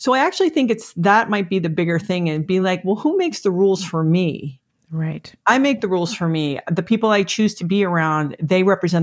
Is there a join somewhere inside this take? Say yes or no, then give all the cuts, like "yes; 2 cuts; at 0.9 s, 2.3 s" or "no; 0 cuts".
no; 0 cuts